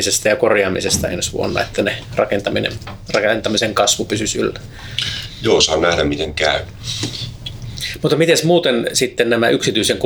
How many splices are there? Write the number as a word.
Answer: zero